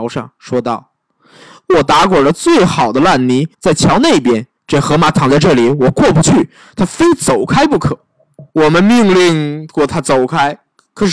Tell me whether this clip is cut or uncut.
cut